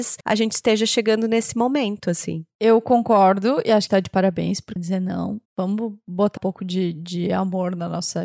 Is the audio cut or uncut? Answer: cut